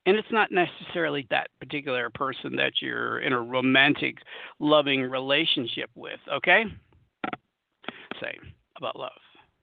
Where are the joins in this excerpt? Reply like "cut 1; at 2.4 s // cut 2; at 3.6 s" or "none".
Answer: cut 1; at 1.3 s // cut 2; at 8.1 s